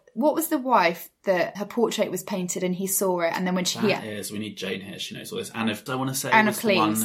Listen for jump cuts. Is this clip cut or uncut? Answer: cut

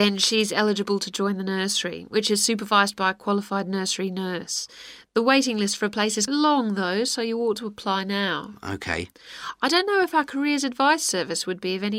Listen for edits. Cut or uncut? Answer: cut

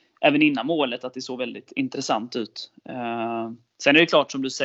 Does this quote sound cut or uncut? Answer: uncut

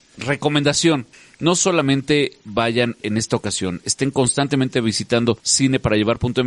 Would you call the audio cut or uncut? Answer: cut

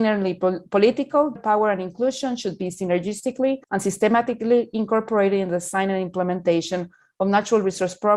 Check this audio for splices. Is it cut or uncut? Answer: cut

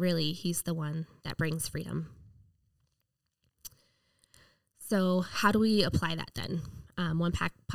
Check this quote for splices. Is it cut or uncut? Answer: uncut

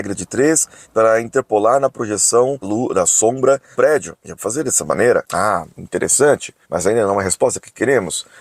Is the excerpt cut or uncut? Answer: cut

